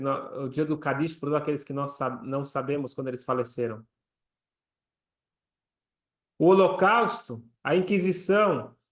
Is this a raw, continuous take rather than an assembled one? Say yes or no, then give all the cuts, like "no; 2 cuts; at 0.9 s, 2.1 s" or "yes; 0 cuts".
yes; 0 cuts